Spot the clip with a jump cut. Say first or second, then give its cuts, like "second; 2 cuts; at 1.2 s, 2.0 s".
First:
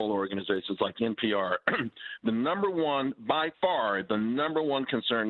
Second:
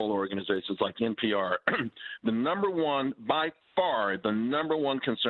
first; 1 cut; at 3.5 s